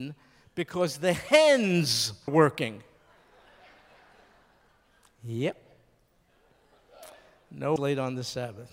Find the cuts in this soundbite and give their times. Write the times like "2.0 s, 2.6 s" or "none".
2.3 s, 7.8 s